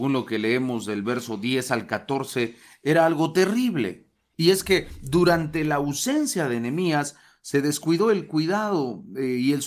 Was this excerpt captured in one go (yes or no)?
yes